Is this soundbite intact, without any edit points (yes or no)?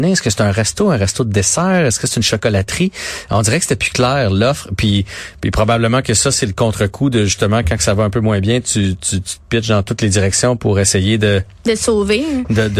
yes